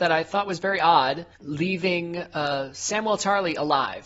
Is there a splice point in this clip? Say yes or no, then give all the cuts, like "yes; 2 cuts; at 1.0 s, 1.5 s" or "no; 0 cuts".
yes; 1 cut; at 1.3 s